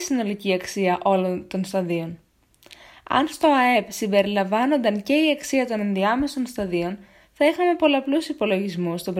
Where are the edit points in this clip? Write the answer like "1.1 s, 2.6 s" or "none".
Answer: none